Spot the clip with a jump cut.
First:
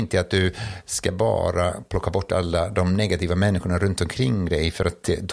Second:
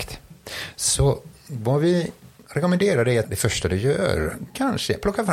second; 1 cut; at 3.2 s

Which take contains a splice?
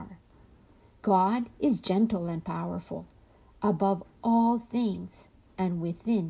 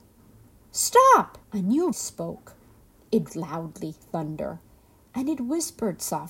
second; 4 cuts; at 1.4 s, 1.9 s, 3.3 s, 4.0 s

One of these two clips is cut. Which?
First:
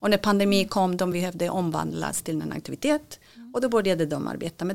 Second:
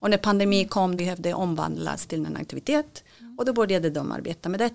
second; 1 cut; at 1.0 s

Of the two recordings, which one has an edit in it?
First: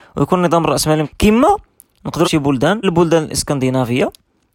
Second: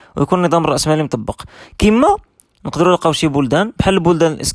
first; 3 cuts; at 1.0 s, 2.2 s, 2.8 s

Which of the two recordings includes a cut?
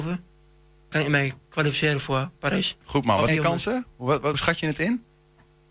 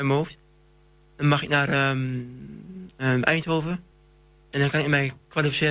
first; 4 cuts; at 0.9 s, 2.8 s, 3.3 s, 4.3 s

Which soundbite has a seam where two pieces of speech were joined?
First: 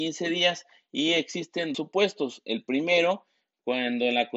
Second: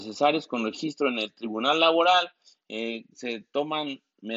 first; 1 cut; at 1.7 s

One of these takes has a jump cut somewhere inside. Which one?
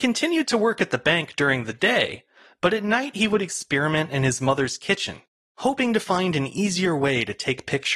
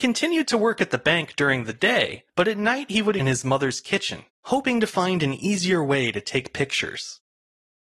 second; 3 cuts; at 2.3 s, 3.2 s, 4.3 s

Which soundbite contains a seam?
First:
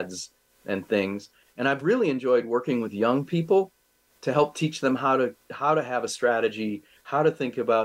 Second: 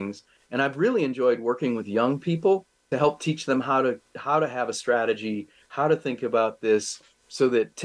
second; 1 cut; at 2.9 s

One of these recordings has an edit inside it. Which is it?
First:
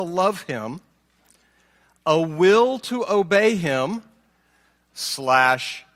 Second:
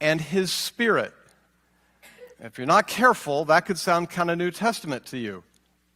second; 1 cut; at 2.3 s

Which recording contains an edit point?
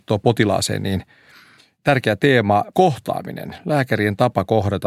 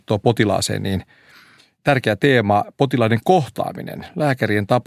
first; 1 cut; at 2.7 s

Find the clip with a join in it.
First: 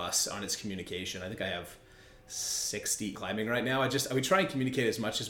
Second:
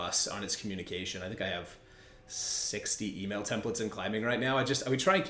first; 1 cut; at 3.1 s

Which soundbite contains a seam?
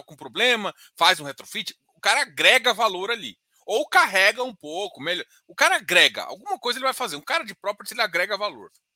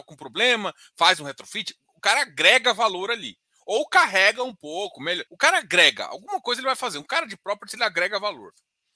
second; 1 cut; at 5.3 s

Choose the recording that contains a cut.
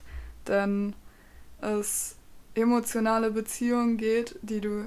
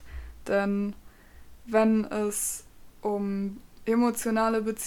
first; 2 cuts; at 1.6 s, 2.5 s

